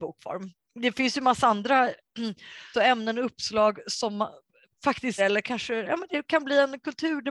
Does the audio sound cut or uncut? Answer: cut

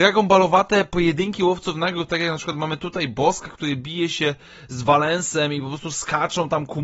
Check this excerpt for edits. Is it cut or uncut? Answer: uncut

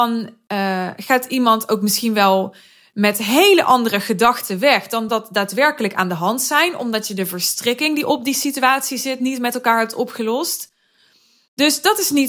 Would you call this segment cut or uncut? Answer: uncut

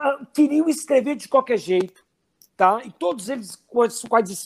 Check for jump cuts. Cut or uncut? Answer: uncut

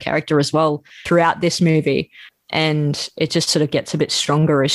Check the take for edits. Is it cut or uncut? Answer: uncut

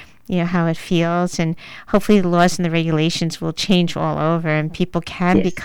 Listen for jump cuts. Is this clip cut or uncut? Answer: uncut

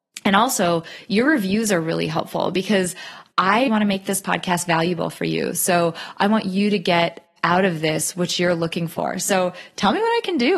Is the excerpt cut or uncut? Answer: cut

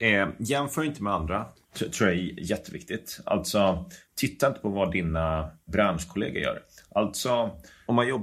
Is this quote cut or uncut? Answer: uncut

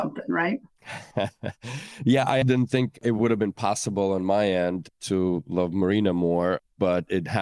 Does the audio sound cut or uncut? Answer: cut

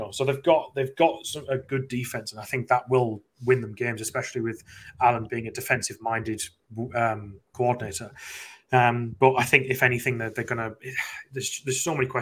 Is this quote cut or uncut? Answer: uncut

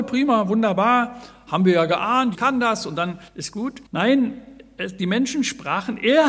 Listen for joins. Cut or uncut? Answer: cut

